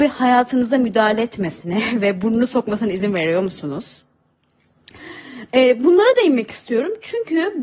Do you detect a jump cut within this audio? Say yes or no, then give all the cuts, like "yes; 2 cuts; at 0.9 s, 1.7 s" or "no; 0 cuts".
no; 0 cuts